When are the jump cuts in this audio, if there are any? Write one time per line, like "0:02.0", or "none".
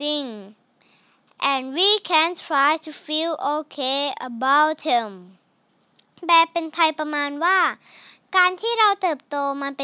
none